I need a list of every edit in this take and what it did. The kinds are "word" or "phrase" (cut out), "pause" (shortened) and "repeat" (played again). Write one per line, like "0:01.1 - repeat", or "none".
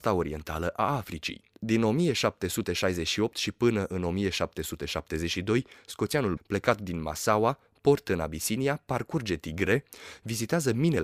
0:06.4 - word